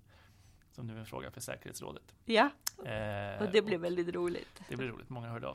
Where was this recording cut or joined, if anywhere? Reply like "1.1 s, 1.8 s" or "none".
2.2 s